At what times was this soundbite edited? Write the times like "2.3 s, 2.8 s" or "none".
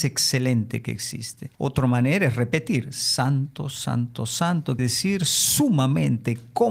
1.5 s, 4.8 s